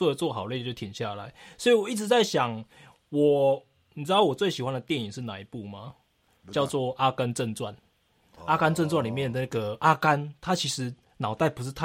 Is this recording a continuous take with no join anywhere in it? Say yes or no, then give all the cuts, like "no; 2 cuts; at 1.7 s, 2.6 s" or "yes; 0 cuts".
yes; 0 cuts